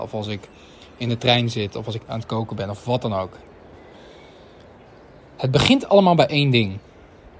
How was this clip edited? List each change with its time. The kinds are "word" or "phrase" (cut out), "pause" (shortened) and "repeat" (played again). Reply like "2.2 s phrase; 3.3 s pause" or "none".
2.1 s word